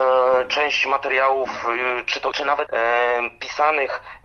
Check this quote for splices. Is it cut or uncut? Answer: cut